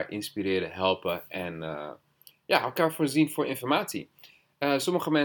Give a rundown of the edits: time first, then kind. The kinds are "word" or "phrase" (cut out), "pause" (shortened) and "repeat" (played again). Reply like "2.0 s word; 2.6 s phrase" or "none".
none